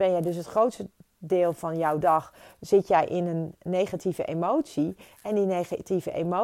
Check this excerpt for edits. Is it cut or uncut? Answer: uncut